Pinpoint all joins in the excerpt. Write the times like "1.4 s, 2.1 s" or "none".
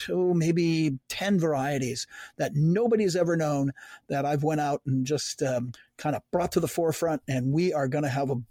none